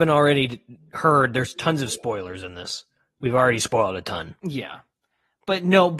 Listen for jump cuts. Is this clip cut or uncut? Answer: cut